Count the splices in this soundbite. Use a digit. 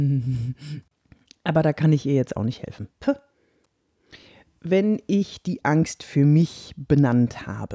0